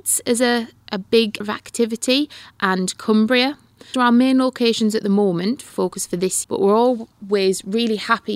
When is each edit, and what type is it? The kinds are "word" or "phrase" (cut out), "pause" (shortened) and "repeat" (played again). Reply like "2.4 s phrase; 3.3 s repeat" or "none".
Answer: 1.4 s word; 3.9 s word; 5.7 s word; 6.4 s word